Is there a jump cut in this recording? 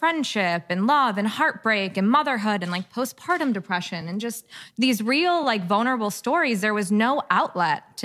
no; 0 cuts

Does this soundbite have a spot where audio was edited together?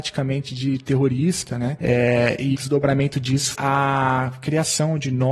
yes; 2 cuts; at 2.5 s, 3.5 s

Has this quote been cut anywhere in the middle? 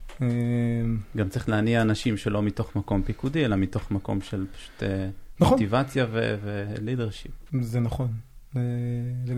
yes; 1 cut; at 7.5 s

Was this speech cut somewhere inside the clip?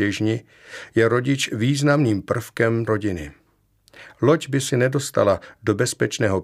yes; 2 cuts; at 2.9 s, 4.7 s

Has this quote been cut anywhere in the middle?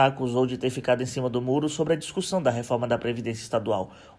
no; 0 cuts

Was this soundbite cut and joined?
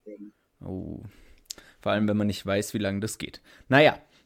no; 0 cuts

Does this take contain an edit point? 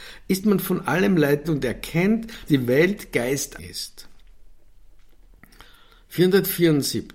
yes; 3 cuts; at 1.4 s, 2.5 s, 3.6 s

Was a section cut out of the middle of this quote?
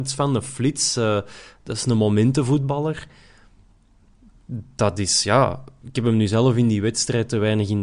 no; 0 cuts

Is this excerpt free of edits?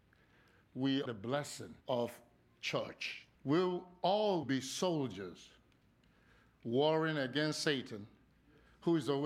no; 4 cuts; at 1.1 s, 1.8 s, 3.3 s, 4.4 s

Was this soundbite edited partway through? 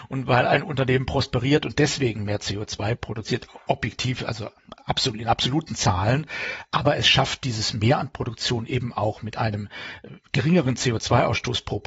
no; 0 cuts

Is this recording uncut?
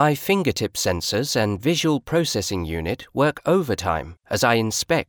yes; 0 cuts

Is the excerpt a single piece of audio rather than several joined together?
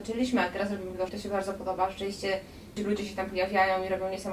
no; 2 cuts; at 1.1 s, 2.8 s

